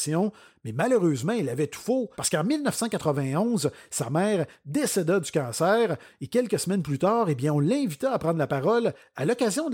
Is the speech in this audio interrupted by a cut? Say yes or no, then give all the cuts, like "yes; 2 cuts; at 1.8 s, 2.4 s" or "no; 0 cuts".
yes; 1 cut; at 2.1 s